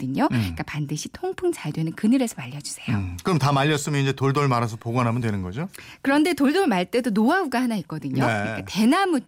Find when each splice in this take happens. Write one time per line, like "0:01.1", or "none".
none